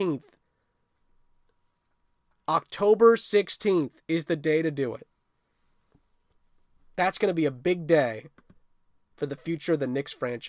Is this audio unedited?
yes; 0 cuts

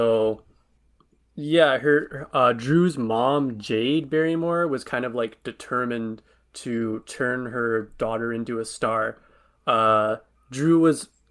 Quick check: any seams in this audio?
no; 0 cuts

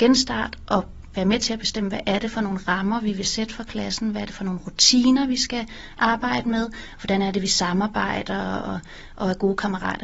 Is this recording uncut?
yes; 0 cuts

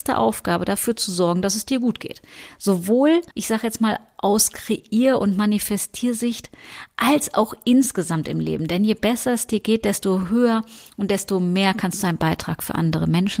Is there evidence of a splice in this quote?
yes; 1 cut; at 3.3 s

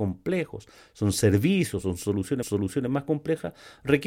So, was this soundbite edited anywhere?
yes; 1 cut; at 2.4 s

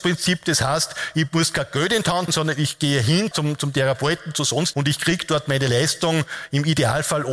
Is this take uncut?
no; 3 cuts; at 2.3 s, 3.3 s, 4.7 s

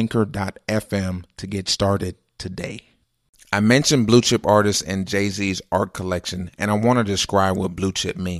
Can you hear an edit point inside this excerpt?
no; 0 cuts

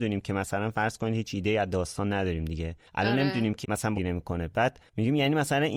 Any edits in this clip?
yes; 3 cuts; at 2.9 s, 3.6 s, 3.9 s

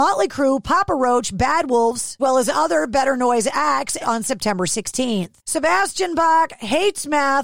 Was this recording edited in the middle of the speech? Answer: yes; 2 cuts; at 2.2 s, 4.0 s

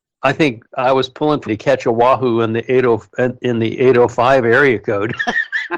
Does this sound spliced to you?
yes; 1 cut; at 1.5 s

